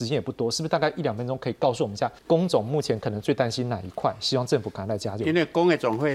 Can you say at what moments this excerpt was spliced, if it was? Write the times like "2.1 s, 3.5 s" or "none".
2.2 s